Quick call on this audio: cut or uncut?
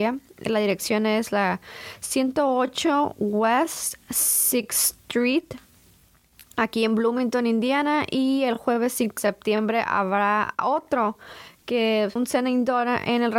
cut